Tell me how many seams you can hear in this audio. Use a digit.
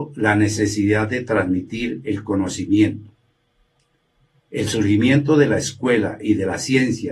0